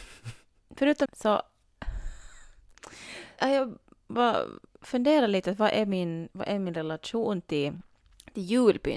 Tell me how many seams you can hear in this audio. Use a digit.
2